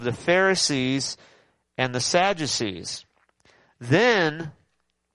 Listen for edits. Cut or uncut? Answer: uncut